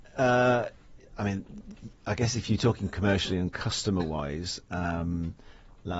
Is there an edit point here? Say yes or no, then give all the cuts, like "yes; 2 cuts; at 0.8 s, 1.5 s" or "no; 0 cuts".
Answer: no; 0 cuts